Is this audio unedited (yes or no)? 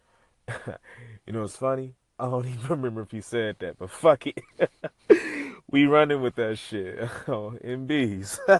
yes